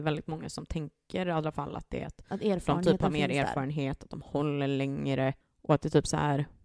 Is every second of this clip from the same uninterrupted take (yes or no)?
yes